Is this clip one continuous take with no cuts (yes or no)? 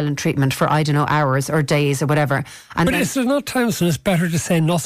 yes